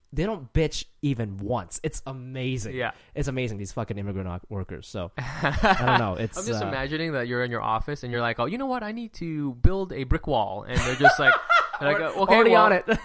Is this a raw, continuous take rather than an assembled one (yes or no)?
yes